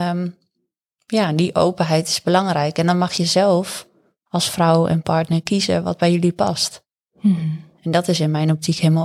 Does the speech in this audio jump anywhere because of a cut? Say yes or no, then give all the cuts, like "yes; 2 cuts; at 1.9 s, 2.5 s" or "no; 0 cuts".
no; 0 cuts